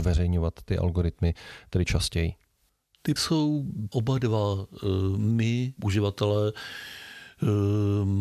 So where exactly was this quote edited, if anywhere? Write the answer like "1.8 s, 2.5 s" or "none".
3.2 s, 3.9 s, 5.8 s